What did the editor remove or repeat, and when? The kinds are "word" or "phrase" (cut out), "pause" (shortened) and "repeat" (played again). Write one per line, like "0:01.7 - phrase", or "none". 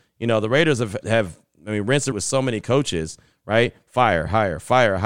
0:01.0 - word
0:02.1 - word